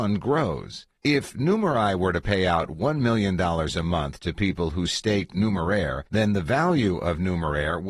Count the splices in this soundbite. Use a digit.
2